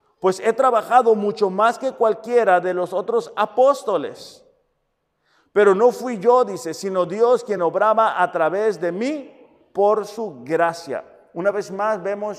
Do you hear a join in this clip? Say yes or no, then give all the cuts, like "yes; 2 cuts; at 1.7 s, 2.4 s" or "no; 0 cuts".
no; 0 cuts